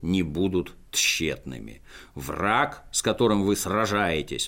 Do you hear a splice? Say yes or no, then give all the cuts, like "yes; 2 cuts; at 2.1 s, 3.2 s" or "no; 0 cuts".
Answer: no; 0 cuts